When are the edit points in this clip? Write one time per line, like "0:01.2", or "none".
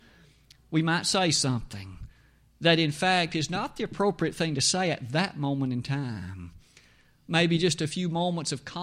none